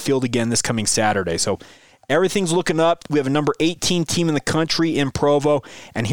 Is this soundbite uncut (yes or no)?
yes